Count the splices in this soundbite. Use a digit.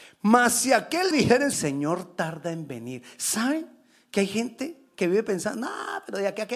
2